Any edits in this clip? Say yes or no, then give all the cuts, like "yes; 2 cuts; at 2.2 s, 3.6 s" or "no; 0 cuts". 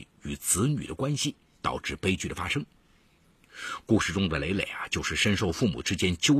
yes; 1 cut; at 1.5 s